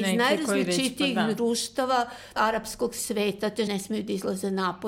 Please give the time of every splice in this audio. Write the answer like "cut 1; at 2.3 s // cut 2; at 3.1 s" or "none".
cut 1; at 2.4 s // cut 2; at 3.7 s